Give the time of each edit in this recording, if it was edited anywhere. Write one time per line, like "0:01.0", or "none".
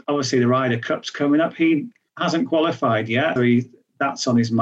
0:03.4

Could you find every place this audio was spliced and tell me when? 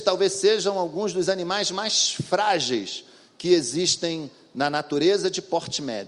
none

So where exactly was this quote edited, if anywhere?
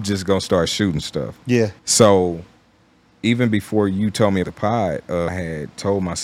0:01.8
0:04.4

